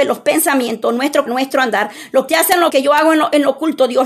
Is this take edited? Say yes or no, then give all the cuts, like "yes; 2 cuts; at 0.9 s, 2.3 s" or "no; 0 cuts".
yes; 3 cuts; at 1.3 s, 2.3 s, 2.7 s